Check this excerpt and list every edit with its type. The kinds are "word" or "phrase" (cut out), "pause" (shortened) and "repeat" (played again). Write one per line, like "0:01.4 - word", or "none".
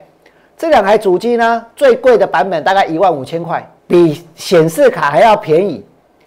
0:03.8 - pause